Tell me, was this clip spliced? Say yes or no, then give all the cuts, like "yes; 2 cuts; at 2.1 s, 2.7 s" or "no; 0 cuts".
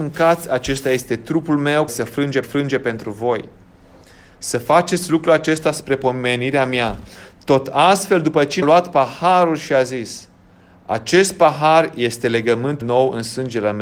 yes; 4 cuts; at 1.9 s, 2.4 s, 8.6 s, 12.8 s